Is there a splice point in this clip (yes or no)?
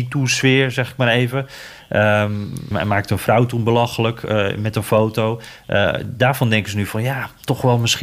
yes